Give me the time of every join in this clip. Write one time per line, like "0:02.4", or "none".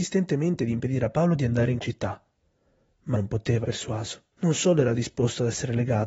0:01.8
0:03.1
0:03.6
0:04.3

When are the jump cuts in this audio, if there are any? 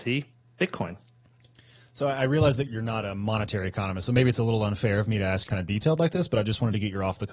0:02.7
0:05.5

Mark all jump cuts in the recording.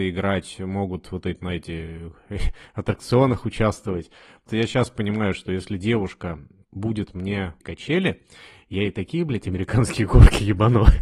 0:04.5
0:06.6
0:07.6

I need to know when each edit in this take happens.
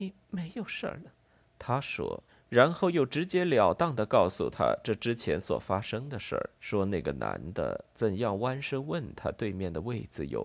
0:01.2
0:02.3
0:06.6

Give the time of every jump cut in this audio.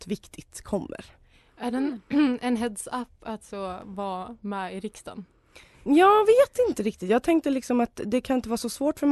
none

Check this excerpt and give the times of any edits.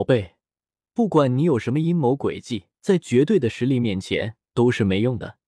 0:02.7
0:04.4

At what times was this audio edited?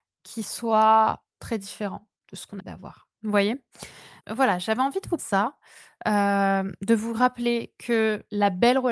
0:01.3
0:02.2
0:02.6
0:03.1
0:04.2
0:05.2

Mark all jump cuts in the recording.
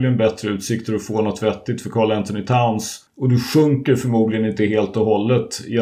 0:03.1

